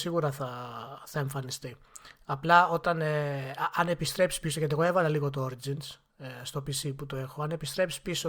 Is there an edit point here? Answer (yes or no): yes